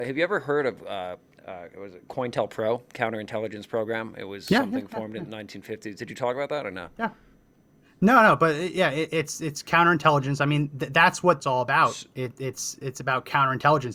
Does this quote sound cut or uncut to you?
cut